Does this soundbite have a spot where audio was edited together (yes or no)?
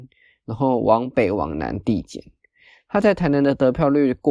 no